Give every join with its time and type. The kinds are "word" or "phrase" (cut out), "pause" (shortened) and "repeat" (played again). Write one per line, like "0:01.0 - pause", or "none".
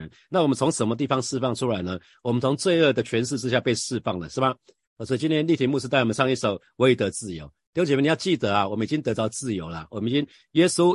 none

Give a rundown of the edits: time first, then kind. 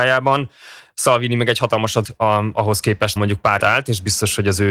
0:02.0 - word
0:03.2 - word
0:03.6 - phrase

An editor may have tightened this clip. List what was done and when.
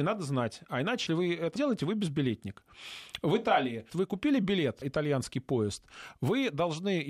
0:01.1 - word
0:01.6 - word
0:03.9 - word
0:04.8 - word

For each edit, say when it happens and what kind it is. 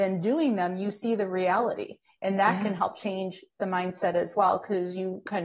none

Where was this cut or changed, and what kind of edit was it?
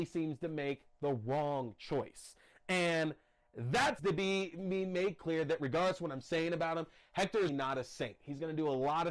0:04.0 - phrase
0:07.5 - word

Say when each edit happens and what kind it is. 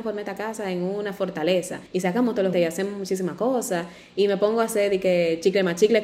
0:01.9 - pause
0:02.5 - word

